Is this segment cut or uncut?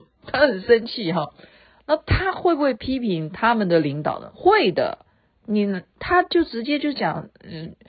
uncut